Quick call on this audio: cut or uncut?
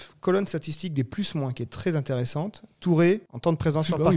uncut